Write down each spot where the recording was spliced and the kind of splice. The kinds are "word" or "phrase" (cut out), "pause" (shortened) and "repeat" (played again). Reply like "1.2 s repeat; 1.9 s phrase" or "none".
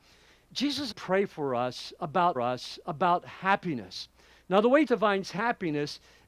0.9 s phrase; 2.4 s repeat; 4.9 s word